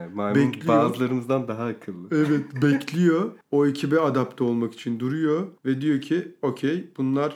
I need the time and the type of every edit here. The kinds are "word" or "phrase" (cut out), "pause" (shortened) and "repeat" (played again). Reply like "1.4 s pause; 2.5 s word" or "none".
3.4 s pause; 5.6 s pause